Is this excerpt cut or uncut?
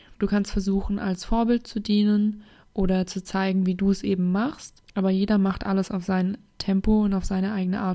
uncut